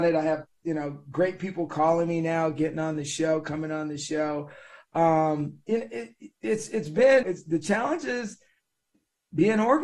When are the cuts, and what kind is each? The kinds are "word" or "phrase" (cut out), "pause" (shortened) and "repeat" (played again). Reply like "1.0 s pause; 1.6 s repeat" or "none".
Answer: 7.2 s word